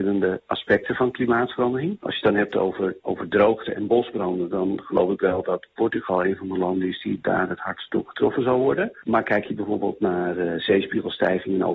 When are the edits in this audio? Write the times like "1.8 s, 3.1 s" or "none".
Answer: none